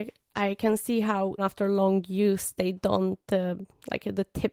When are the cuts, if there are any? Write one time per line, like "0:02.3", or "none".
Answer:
0:01.4